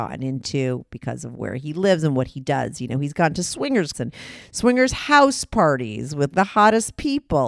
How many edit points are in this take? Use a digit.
2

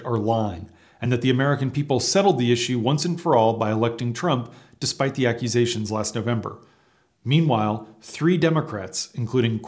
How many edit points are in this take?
0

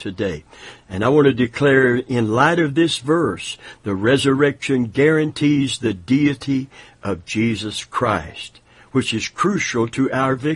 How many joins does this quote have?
0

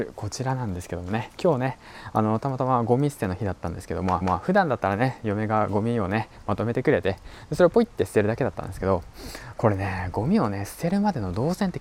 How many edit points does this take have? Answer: 1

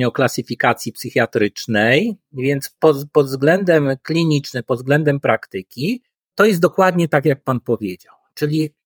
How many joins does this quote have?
1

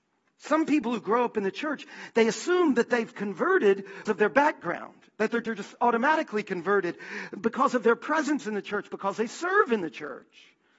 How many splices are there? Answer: 1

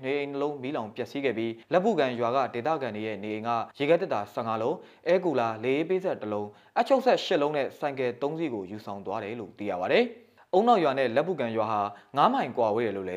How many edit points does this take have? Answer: 2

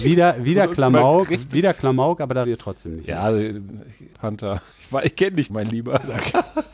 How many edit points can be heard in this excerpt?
4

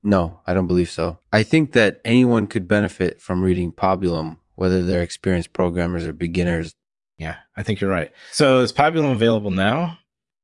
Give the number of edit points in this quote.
1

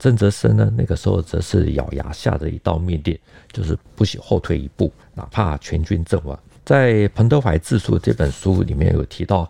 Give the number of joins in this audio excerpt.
0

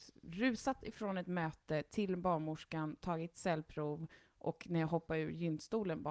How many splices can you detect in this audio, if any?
0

